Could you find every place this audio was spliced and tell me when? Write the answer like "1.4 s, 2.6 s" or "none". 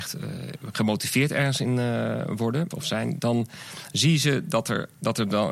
2.7 s